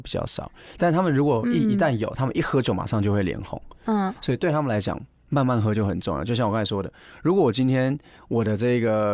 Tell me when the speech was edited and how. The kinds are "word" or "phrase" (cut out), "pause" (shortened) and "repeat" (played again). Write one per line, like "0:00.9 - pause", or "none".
none